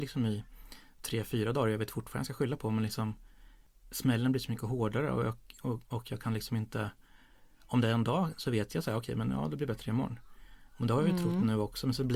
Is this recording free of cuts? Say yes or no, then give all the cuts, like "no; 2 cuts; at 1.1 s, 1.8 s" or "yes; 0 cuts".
yes; 0 cuts